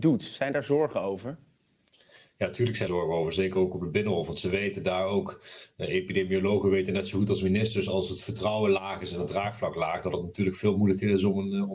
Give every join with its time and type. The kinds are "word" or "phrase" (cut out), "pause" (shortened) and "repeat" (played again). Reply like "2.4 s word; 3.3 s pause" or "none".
2.9 s word